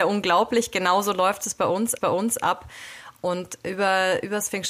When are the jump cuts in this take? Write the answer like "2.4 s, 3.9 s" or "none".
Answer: 2.0 s